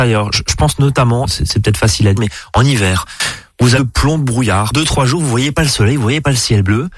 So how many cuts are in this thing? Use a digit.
4